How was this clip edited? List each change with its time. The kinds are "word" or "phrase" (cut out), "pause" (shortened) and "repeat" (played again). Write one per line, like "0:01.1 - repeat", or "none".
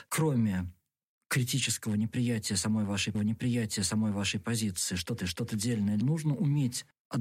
0:03.1 - repeat
0:05.2 - repeat
0:06.0 - word

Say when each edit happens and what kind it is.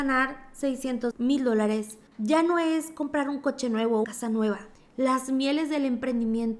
0:01.1 - word
0:02.1 - pause
0:04.0 - word
0:04.7 - pause

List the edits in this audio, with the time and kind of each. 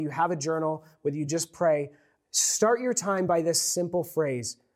none

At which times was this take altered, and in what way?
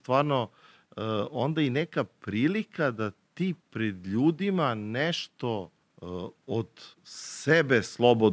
0:03.6 - pause
0:05.8 - pause
0:06.9 - pause

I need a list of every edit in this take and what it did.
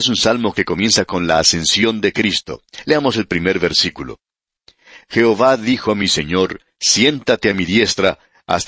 none

